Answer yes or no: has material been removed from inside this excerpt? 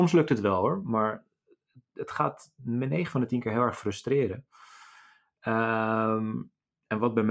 no